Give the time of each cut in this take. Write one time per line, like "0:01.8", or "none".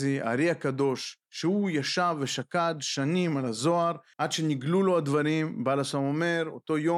0:01.2